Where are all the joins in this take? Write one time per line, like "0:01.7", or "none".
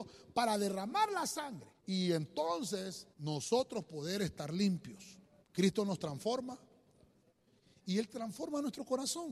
0:01.8
0:03.1
0:05.4